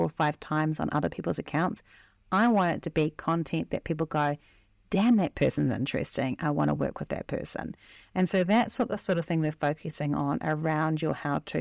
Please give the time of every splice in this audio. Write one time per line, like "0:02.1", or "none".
none